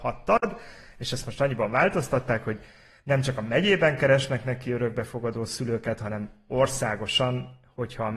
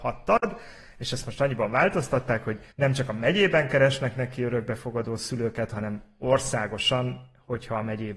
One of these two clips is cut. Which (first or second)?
second